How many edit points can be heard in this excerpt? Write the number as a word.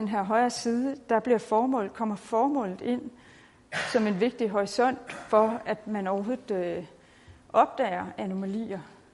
zero